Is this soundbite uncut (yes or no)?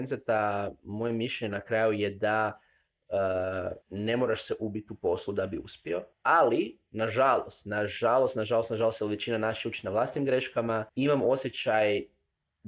no